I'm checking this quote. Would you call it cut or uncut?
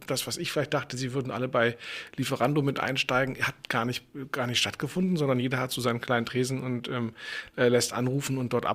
uncut